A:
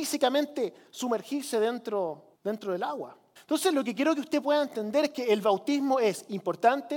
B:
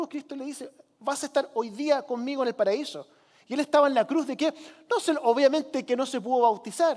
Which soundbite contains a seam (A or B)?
A